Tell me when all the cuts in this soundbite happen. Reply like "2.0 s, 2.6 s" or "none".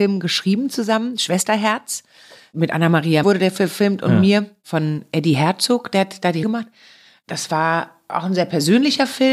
3.2 s, 6.4 s